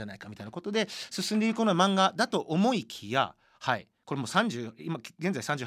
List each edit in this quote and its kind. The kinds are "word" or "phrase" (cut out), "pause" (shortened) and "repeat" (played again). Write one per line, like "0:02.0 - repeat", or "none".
none

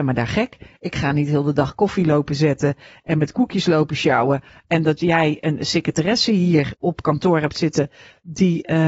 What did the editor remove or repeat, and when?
0:06.7 - word

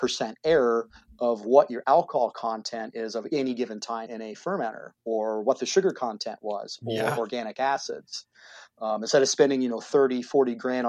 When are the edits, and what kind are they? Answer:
0:04.1 - word

